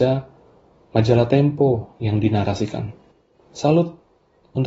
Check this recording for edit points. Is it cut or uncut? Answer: cut